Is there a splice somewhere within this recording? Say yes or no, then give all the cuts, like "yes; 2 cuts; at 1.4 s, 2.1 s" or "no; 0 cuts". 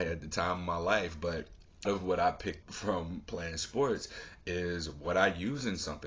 yes; 2 cuts; at 1.9 s, 2.6 s